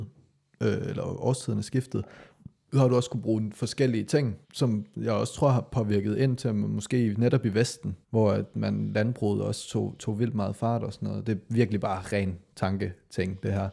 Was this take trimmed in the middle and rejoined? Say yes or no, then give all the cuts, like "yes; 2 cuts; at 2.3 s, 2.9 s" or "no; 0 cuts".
yes; 2 cuts; at 4.4 s, 8.0 s